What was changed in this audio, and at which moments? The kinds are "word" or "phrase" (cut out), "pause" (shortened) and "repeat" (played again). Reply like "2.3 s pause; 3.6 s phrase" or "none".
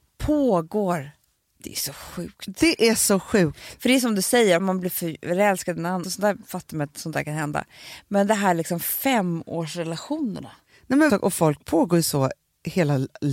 4.6 s word; 6.0 s word; 11.1 s word